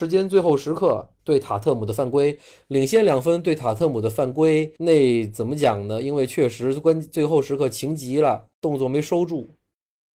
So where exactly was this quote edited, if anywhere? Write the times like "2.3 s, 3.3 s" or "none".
1.2 s, 4.8 s, 8.5 s